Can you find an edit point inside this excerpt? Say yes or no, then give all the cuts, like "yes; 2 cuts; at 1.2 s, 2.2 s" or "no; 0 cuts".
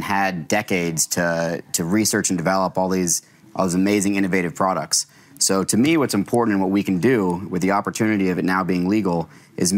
no; 0 cuts